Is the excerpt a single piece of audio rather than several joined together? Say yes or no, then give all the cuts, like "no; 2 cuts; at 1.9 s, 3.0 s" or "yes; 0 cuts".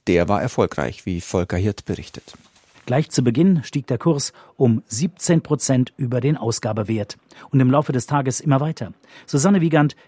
yes; 0 cuts